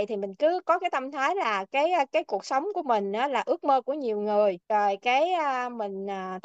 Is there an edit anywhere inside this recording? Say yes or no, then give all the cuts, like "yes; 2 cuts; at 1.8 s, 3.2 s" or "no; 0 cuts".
yes; 1 cut; at 4.6 s